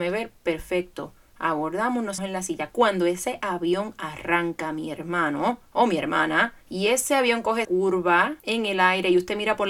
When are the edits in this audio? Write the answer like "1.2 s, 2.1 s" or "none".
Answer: 2.2 s, 6.6 s, 7.6 s